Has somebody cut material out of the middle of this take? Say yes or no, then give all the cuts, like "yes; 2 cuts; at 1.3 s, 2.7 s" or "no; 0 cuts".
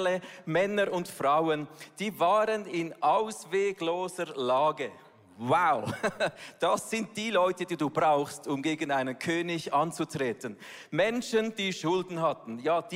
no; 0 cuts